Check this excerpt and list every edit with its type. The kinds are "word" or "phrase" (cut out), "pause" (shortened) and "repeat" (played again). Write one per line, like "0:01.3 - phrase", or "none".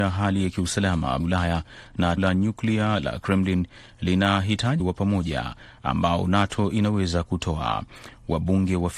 0:01.2 - word
0:02.2 - word
0:04.8 - word